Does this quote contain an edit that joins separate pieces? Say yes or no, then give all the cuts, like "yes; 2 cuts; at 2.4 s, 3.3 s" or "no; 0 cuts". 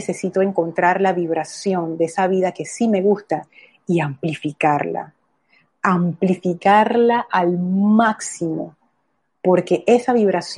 no; 0 cuts